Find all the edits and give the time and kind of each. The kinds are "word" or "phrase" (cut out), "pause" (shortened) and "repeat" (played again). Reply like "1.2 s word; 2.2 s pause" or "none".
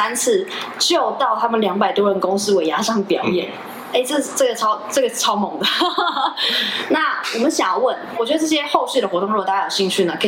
8.1 s phrase